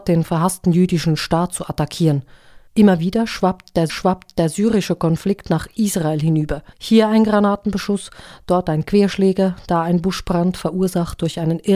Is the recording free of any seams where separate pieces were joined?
no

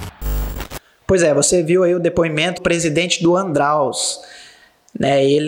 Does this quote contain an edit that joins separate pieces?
yes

